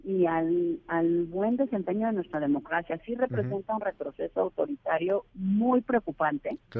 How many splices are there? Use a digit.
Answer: 0